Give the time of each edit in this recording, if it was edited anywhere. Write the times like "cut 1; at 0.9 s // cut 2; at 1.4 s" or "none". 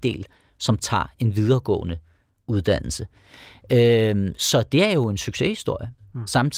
none